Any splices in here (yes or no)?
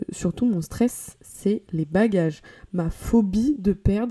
no